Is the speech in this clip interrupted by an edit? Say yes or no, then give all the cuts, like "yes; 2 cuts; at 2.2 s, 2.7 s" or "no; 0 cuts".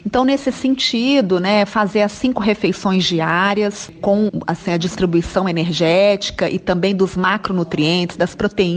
yes; 1 cut; at 4.3 s